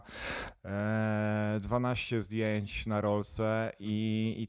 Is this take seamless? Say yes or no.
yes